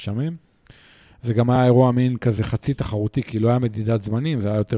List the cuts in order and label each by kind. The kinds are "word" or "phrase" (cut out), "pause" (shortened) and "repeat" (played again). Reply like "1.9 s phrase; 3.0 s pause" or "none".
none